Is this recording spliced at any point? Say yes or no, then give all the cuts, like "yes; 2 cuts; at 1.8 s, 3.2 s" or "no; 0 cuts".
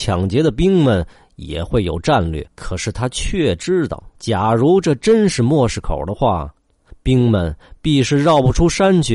yes; 2 cuts; at 2.5 s, 4.1 s